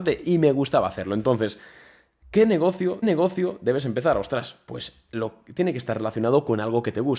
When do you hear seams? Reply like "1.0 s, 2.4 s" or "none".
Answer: 3.0 s

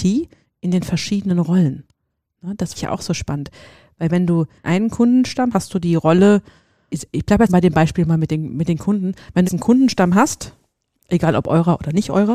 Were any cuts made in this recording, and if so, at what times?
2.7 s, 4.6 s, 5.5 s, 6.9 s, 7.5 s, 9.4 s

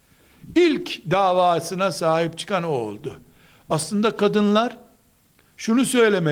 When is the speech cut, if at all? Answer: none

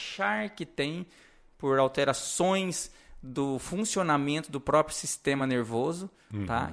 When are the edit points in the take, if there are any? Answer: none

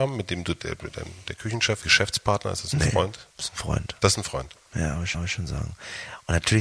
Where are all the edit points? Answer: 1.8 s, 3.3 s, 5.1 s

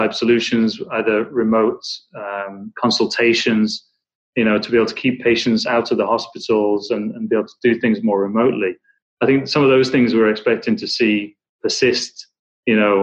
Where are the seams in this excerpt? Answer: none

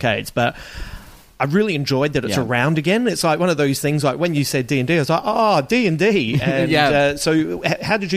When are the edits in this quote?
none

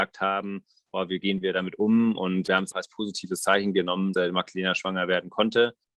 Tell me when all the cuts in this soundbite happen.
2.7 s, 4.1 s

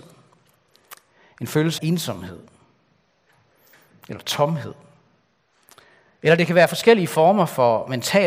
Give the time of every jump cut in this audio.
1.8 s

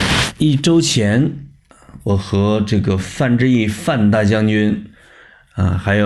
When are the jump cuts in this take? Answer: none

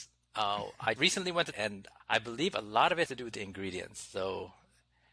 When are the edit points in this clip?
1.0 s, 1.5 s, 2.0 s, 3.1 s

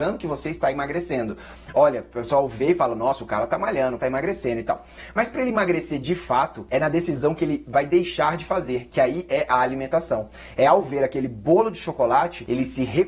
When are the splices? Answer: 4.0 s

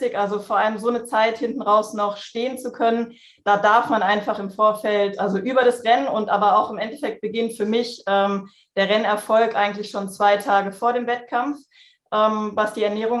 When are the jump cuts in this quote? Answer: none

